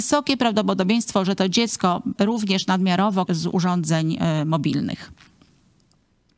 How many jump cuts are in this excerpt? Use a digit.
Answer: 2